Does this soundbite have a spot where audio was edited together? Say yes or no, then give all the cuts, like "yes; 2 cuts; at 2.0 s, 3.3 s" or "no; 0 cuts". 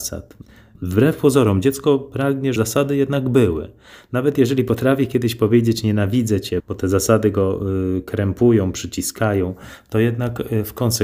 yes; 2 cuts; at 2.6 s, 6.6 s